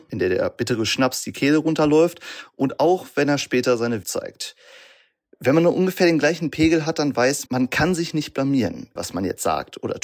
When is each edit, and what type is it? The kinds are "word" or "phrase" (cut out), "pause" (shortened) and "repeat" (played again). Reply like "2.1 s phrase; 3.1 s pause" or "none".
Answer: 4.0 s word; 7.5 s word; 9.0 s word